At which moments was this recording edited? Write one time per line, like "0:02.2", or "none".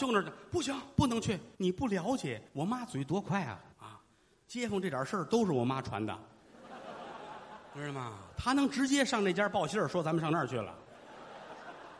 0:01.5
0:02.5
0:03.7